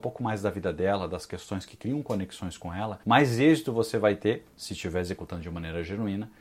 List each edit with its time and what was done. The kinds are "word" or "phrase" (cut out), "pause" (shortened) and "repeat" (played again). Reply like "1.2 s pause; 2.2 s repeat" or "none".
3.0 s pause

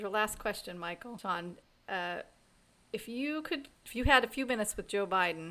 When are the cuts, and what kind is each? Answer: 3.7 s pause

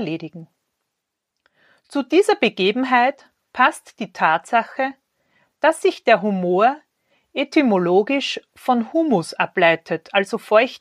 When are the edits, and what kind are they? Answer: none

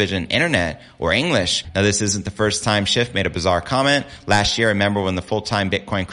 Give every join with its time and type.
none

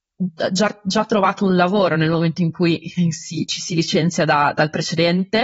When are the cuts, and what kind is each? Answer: none

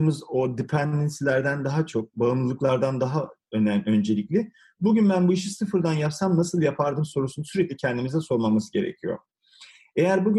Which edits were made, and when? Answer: none

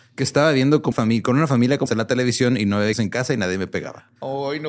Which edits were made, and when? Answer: 0.9 s word; 1.9 s word; 2.9 s word

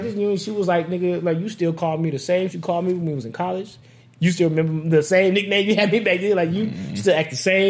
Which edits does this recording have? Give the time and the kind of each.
2.5 s word

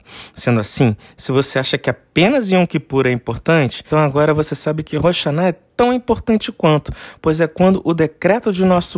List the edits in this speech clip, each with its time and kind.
3.9 s word

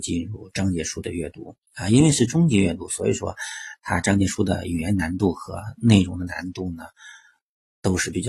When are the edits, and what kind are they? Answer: 1.6 s pause

